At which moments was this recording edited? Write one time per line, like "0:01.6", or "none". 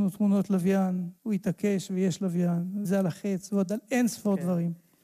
0:01.2
0:02.8

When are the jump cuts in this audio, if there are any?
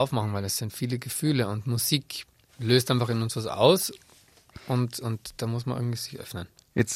0:02.5

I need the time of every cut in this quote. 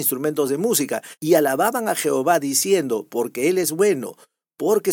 0:01.2

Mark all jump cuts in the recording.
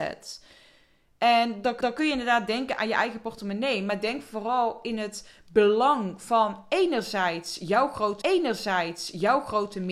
0:01.8
0:08.2

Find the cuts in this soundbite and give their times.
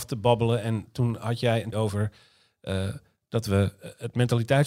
0:01.7

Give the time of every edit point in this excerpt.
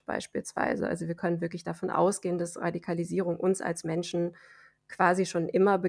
none

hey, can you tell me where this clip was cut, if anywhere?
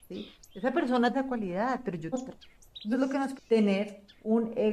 0:01.1
0:02.1
0:02.9
0:03.4

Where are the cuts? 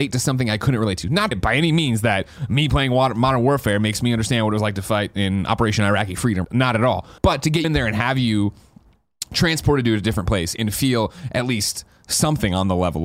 0:01.3
0:06.4
0:07.2
0:07.6

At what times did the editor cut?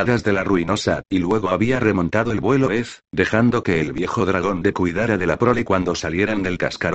0:01.0
0:02.7
0:04.7

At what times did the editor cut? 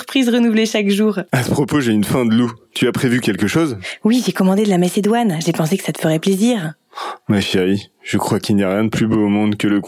0:01.3

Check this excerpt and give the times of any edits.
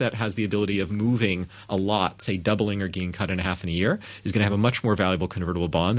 none

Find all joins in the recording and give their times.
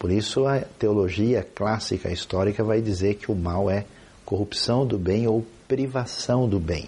none

